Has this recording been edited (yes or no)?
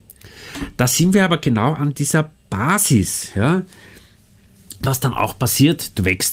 no